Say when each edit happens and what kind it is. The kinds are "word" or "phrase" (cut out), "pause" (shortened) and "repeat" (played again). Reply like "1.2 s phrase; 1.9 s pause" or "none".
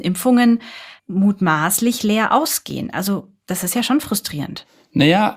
1.0 s pause

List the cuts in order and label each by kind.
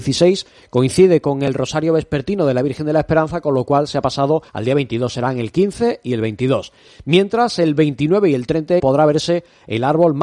4.5 s pause; 8.8 s word

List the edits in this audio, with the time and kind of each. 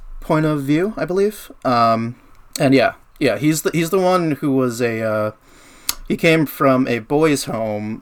2.3 s pause

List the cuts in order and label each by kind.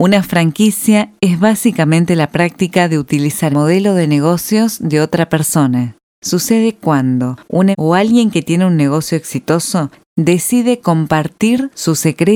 3.5 s word; 7.7 s word

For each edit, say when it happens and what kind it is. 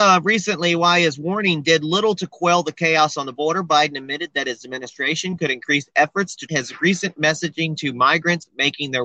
6.5 s word

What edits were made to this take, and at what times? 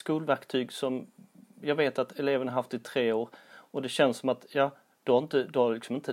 none

